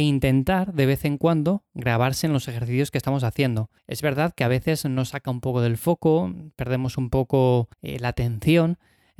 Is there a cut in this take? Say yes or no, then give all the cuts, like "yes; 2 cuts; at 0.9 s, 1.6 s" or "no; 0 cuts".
yes; 2 cuts; at 3.8 s, 7.7 s